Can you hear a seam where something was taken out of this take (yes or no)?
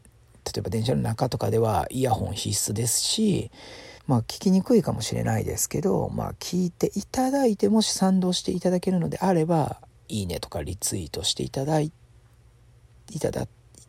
yes